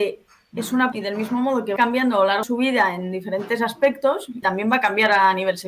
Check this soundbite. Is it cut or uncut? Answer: cut